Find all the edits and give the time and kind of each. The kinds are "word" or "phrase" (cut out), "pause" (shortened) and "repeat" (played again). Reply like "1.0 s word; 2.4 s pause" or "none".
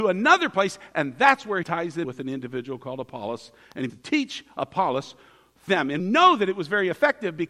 1.6 s word; 2.0 s word; 3.9 s word; 5.7 s word; 6.0 s word